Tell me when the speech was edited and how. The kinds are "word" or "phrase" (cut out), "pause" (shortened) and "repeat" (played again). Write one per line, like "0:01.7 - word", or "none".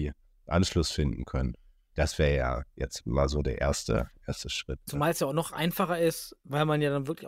none